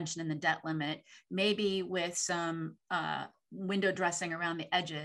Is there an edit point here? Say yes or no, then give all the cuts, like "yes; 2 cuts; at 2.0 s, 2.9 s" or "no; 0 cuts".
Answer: no; 0 cuts